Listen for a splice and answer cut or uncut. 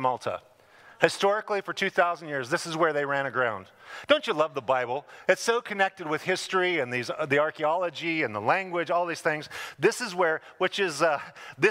uncut